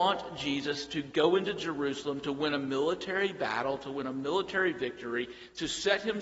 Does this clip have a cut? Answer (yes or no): no